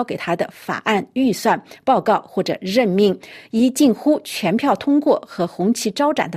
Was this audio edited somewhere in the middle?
no; 0 cuts

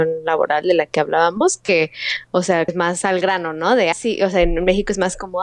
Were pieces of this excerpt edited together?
yes; 2 cuts; at 2.7 s, 3.9 s

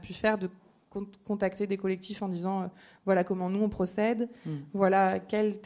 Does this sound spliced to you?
no; 0 cuts

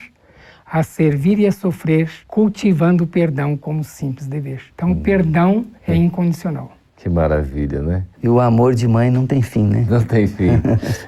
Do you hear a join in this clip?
yes; 4 cuts; at 2.2 s, 4.7 s, 5.8 s, 8.1 s

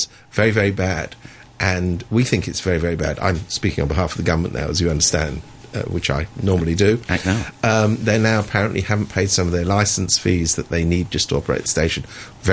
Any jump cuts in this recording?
no; 0 cuts

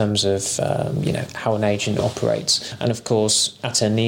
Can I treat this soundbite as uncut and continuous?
yes; 0 cuts

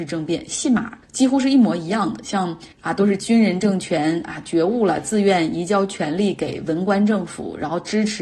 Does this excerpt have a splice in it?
yes; 2 cuts; at 1.0 s, 2.7 s

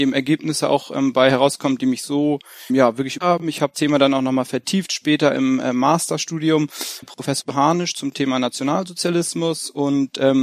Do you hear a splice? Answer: yes; 4 cuts; at 2.7 s, 3.2 s, 3.7 s, 7.0 s

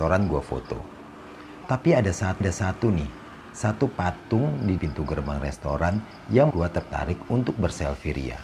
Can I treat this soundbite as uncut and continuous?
no; 3 cuts; at 2.4 s, 4.8 s, 6.5 s

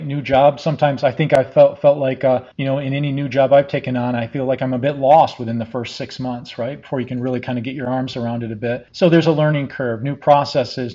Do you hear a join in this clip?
yes; 2 cuts; at 2.5 s, 8.9 s

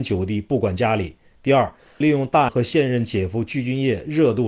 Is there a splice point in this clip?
yes; 2 cuts; at 2.0 s, 2.5 s

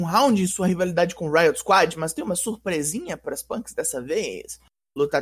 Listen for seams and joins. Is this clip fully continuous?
yes; 0 cuts

